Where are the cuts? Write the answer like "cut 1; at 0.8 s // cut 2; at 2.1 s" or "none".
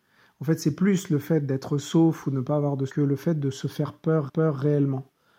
cut 1; at 2.9 s // cut 2; at 4.3 s